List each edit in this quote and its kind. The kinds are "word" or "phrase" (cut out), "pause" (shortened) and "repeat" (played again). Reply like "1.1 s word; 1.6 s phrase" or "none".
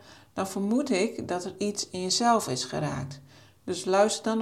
none